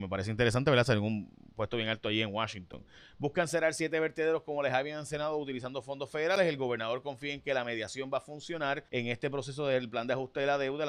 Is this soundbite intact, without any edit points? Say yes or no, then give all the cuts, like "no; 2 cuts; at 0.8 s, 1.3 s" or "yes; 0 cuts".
no; 1 cut; at 8.9 s